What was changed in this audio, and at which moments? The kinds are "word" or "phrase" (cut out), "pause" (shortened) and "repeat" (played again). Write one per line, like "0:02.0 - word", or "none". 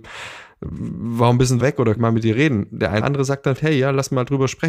0:01.6 - word
0:02.0 - word
0:03.0 - word
0:03.6 - word